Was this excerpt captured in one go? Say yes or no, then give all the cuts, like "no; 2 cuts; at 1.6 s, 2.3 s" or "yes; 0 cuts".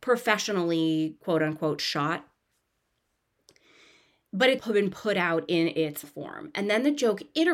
no; 2 cuts; at 4.6 s, 6.0 s